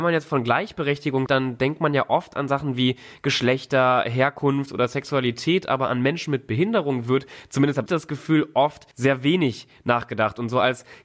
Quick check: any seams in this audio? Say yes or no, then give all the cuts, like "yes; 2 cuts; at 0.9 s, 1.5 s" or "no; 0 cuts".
yes; 3 cuts; at 1.3 s, 7.9 s, 8.9 s